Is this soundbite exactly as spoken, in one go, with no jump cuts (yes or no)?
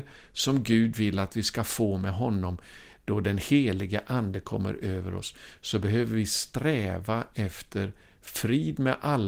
yes